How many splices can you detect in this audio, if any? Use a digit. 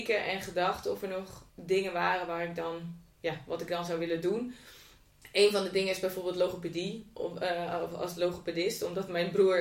2